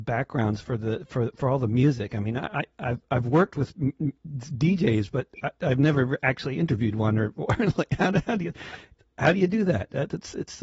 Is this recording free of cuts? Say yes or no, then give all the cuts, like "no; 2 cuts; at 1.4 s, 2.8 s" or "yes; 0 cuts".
yes; 0 cuts